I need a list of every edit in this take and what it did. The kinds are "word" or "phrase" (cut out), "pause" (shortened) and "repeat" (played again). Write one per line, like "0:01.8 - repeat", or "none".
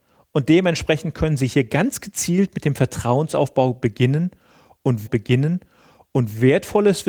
0:05.1 - repeat